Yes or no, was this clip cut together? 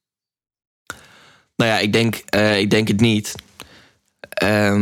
no